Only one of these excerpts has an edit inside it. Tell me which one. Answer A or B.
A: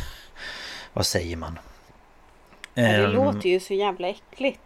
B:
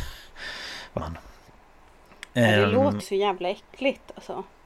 B